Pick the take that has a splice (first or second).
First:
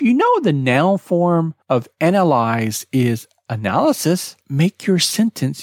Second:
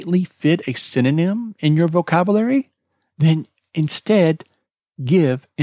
first